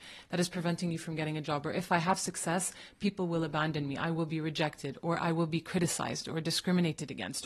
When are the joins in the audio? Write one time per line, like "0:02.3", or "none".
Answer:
none